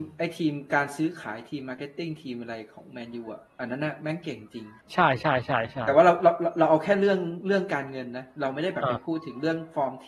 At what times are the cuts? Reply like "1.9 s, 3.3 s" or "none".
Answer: 4.8 s